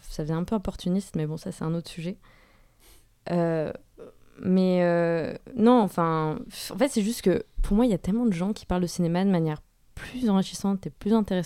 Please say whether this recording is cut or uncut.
uncut